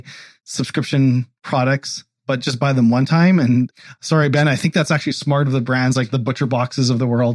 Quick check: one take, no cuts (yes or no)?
yes